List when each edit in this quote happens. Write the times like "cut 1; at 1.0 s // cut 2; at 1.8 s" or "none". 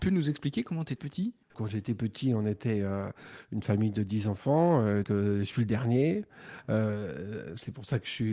cut 1; at 1.0 s // cut 2; at 1.4 s // cut 3; at 5.0 s